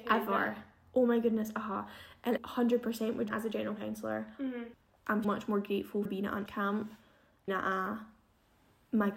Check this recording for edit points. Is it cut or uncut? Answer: cut